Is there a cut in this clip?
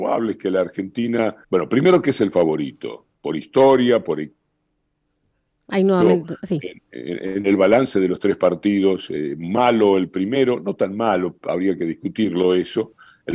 yes; 3 cuts; at 1.4 s, 3.1 s, 4.7 s

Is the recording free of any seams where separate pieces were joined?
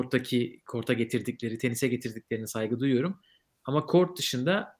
yes; 0 cuts

